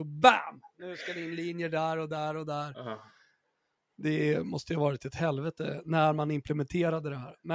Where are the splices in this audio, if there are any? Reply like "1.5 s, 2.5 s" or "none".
none

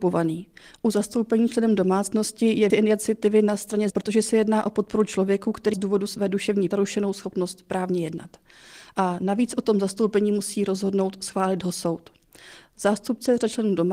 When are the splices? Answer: 2.7 s, 3.9 s, 5.7 s, 6.7 s

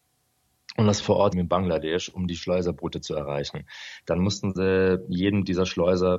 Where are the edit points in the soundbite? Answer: 1.0 s, 1.3 s

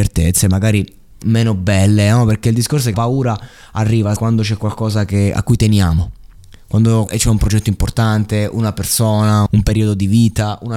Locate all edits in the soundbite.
1.2 s, 2.9 s, 4.2 s, 7.1 s, 9.5 s

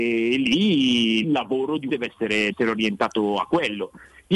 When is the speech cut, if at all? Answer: 1.2 s, 1.9 s, 2.5 s

